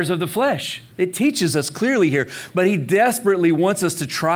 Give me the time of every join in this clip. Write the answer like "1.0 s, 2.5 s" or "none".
0.9 s